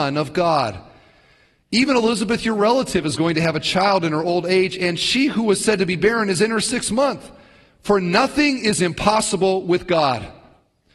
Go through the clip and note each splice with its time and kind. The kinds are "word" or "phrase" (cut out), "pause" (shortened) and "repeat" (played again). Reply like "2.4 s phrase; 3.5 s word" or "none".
none